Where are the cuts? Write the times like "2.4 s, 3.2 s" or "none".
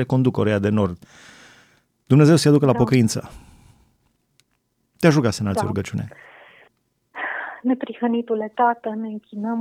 none